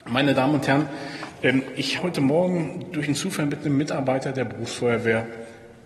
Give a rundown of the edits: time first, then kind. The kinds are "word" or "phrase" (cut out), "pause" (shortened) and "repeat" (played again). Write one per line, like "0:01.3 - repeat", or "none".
0:02.0 - word